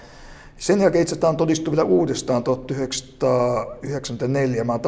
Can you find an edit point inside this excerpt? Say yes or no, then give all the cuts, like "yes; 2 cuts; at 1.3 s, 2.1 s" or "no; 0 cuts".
no; 0 cuts